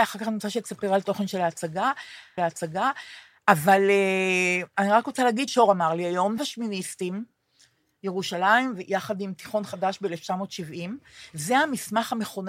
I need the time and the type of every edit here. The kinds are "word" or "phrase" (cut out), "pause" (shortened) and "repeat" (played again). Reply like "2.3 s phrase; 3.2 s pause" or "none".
2.4 s repeat; 5.5 s word; 6.4 s word

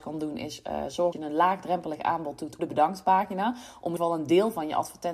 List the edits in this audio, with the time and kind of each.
1.1 s word; 2.6 s word; 4.0 s word

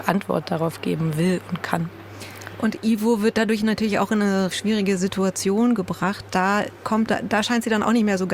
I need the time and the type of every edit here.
4.5 s word; 7.1 s word

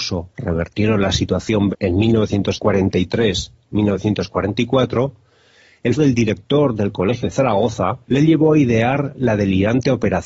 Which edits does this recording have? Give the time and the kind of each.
1.7 s word; 6.0 s word; 7.2 s word; 8.0 s pause

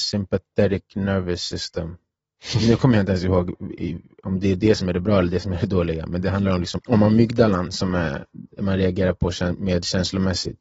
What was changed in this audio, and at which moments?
6.8 s word

